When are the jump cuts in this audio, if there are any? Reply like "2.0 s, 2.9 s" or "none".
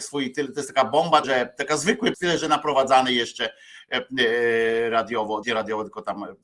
1.2 s, 2.1 s, 5.4 s